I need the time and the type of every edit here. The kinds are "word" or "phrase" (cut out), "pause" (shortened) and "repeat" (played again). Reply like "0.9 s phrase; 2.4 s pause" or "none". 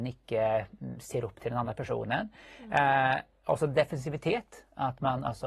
none